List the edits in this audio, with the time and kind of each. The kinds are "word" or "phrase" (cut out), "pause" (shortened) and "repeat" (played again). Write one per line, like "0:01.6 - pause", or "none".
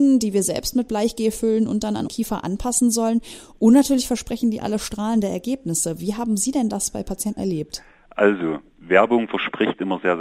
0:02.1 - word
0:07.4 - word

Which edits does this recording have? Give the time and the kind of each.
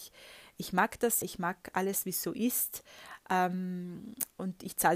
0:01.2 - word

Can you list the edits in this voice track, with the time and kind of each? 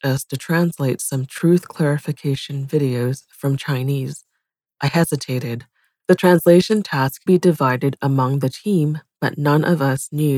0:07.3 - word

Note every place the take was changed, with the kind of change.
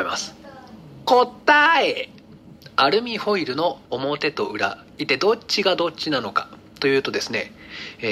0:03.9 - pause

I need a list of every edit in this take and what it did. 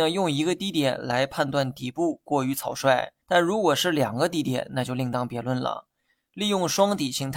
0:03.2 - pause

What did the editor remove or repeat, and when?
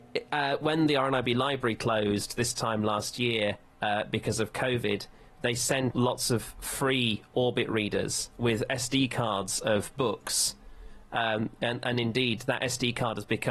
0:05.9 - word

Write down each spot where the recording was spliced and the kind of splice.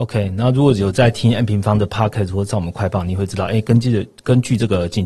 none

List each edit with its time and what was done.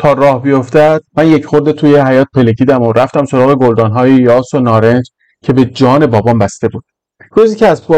0:01.1 - pause

